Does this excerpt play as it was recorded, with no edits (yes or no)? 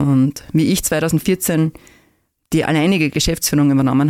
yes